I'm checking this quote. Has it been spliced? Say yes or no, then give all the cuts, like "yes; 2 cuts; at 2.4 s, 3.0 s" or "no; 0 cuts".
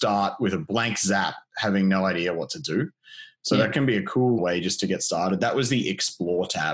yes; 1 cut; at 4.4 s